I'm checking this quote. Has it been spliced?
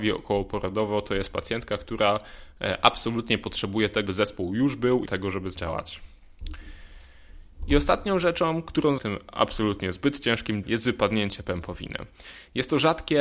yes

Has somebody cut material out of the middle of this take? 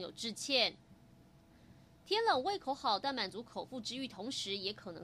no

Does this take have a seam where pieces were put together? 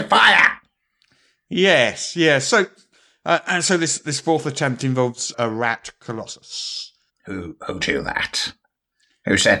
yes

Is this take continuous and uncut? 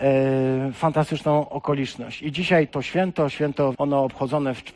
no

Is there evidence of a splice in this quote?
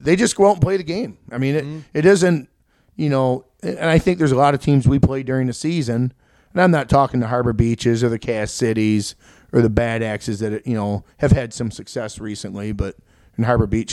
no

